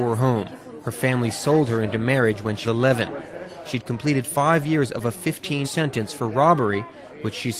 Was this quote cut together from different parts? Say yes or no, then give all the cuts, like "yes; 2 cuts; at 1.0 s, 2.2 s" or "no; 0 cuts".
yes; 2 cuts; at 2.6 s, 5.6 s